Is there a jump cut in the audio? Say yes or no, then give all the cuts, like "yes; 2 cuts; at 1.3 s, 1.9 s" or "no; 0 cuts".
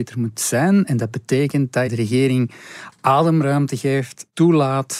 yes; 1 cut; at 1.9 s